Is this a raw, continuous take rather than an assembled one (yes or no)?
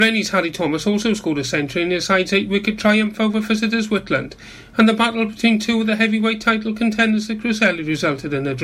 yes